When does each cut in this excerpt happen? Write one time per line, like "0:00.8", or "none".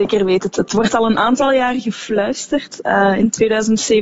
none